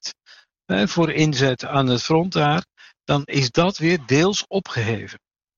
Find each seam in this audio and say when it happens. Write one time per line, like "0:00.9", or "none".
none